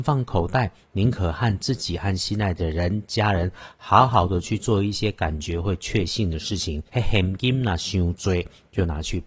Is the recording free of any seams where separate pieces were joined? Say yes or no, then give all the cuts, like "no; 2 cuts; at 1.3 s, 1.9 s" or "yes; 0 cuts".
no; 1 cut; at 6.9 s